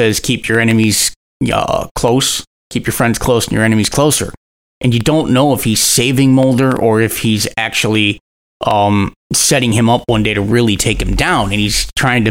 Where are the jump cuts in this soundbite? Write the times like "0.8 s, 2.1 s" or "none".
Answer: none